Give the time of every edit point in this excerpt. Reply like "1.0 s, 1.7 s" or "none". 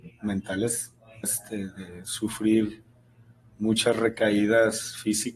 1.2 s

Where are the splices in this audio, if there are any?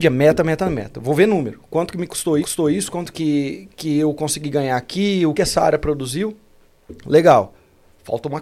2.4 s, 3.1 s, 5.3 s

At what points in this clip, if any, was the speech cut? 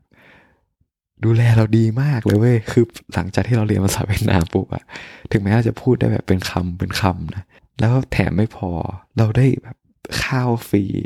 7.6 s

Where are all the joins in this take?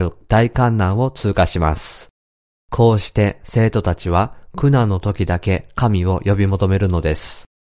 none

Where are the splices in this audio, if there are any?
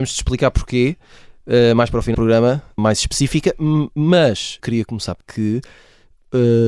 2.1 s, 2.8 s, 4.6 s, 5.2 s

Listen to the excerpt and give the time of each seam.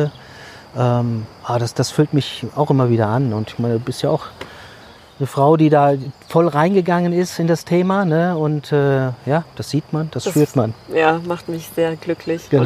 none

